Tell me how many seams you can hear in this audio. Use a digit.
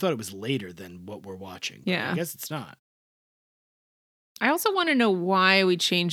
0